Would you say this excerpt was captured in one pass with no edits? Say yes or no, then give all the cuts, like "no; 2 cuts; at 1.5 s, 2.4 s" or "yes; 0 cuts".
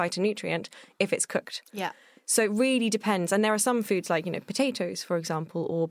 yes; 0 cuts